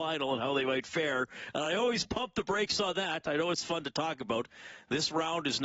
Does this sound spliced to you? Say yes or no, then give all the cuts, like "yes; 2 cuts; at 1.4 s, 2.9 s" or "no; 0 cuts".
no; 0 cuts